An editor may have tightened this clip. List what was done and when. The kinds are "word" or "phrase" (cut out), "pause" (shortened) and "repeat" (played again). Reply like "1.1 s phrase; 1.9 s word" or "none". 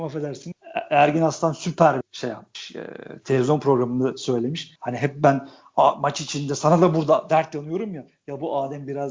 2.0 s word; 4.8 s pause